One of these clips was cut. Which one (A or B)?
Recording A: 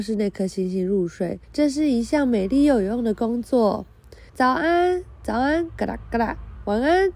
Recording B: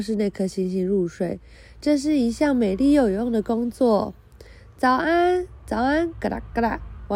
A